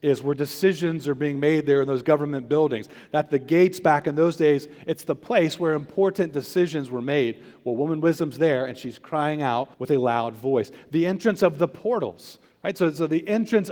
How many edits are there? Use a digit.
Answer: 1